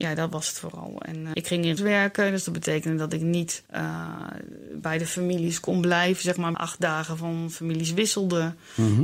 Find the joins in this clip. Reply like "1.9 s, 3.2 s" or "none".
1.3 s, 1.8 s, 3.7 s, 6.5 s